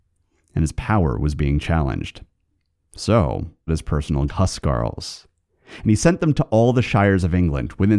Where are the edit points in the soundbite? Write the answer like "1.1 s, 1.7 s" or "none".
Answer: 3.7 s, 4.3 s